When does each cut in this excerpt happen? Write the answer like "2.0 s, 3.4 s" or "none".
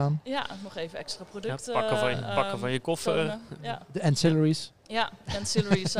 4.8 s